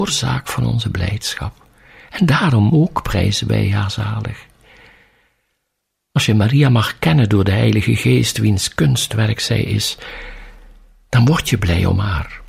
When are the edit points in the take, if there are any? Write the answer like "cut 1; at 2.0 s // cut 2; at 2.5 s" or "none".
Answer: none